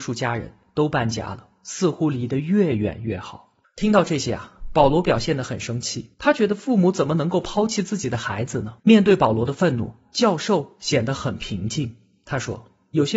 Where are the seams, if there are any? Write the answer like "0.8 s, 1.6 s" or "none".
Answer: 3.6 s, 6.1 s, 8.8 s